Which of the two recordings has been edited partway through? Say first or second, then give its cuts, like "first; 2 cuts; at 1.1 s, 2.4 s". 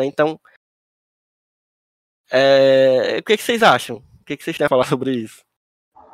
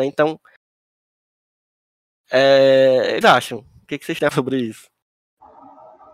second; 2 cuts; at 3.2 s, 4.3 s